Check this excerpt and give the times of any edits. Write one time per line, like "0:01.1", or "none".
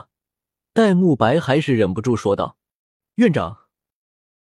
none